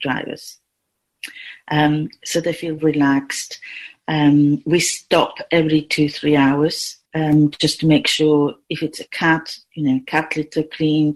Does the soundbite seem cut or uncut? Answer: cut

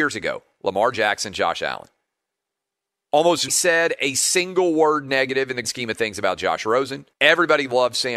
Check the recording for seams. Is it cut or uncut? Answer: cut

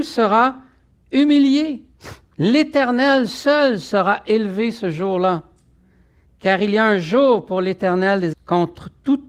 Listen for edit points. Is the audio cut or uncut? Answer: cut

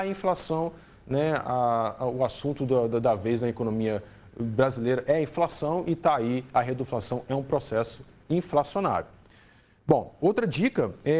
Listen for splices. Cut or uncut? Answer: uncut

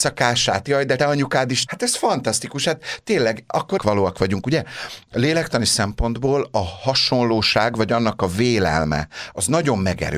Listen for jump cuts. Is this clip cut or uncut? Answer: cut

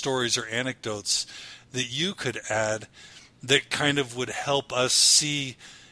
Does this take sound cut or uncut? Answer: uncut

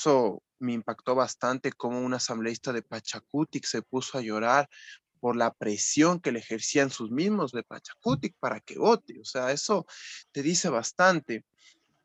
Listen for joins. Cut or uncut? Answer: cut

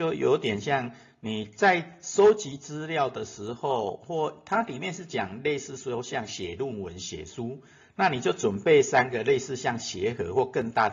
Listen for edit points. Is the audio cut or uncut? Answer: uncut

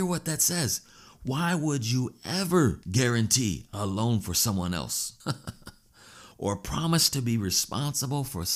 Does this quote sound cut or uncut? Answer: cut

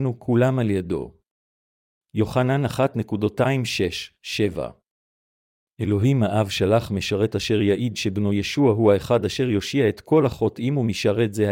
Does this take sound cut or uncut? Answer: uncut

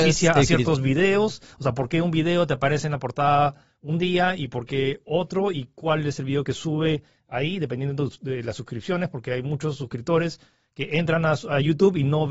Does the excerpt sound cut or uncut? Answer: uncut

